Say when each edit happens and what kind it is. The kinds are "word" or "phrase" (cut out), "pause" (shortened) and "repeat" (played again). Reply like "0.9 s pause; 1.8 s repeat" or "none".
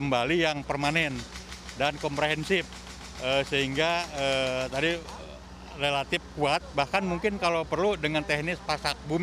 none